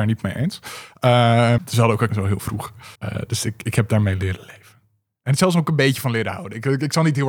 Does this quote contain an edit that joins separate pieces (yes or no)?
yes